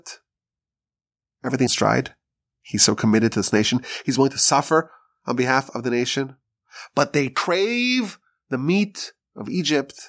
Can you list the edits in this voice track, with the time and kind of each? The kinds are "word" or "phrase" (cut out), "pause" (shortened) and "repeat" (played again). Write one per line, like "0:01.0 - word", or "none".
0:01.7 - phrase